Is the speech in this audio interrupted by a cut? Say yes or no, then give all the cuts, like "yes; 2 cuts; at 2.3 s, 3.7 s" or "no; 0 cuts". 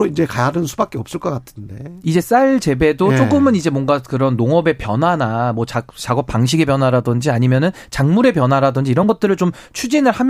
no; 0 cuts